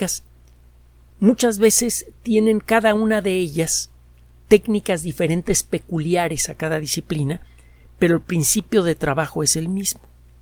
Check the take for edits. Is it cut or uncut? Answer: uncut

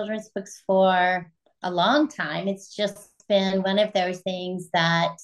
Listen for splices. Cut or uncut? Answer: uncut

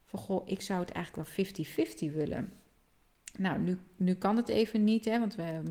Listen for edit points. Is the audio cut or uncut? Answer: uncut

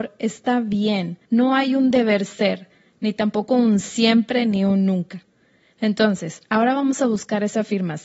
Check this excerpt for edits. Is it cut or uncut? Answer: uncut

